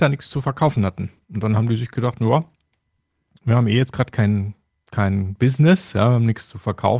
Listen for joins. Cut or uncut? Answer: uncut